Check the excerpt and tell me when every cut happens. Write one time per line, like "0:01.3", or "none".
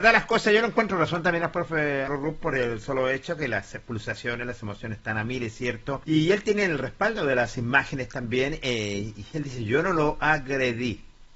0:02.1
0:06.0